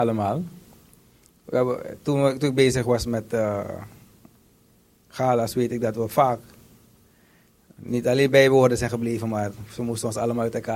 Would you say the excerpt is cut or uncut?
uncut